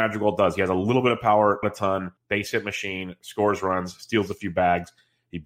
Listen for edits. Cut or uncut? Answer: cut